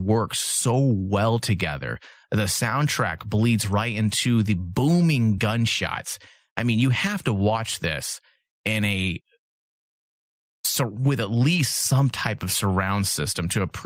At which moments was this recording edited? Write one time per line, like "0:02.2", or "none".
none